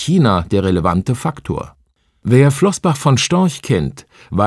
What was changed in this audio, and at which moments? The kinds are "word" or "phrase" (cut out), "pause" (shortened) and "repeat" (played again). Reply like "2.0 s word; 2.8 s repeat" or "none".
none